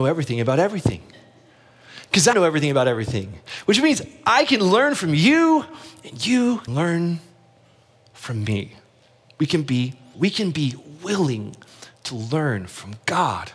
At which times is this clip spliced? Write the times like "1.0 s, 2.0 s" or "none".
2.3 s, 6.7 s, 10.1 s

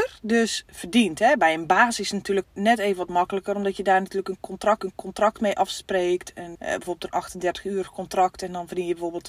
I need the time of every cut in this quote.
2.4 s, 4.8 s, 6.5 s

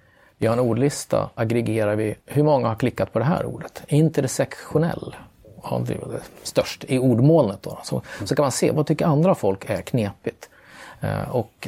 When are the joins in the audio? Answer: 1.4 s, 2.2 s, 6.3 s, 8.7 s

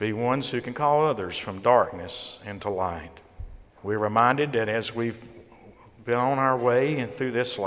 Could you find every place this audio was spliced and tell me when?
3.7 s

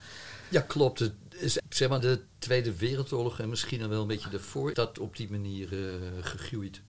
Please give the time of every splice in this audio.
1.6 s, 2.0 s, 4.7 s

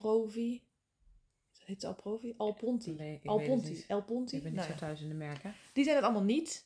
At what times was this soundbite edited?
none

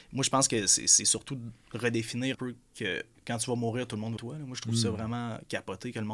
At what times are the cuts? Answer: 2.3 s, 4.2 s

